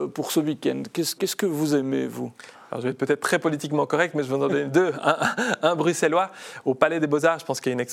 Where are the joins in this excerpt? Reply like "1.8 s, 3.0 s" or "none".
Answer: 1.2 s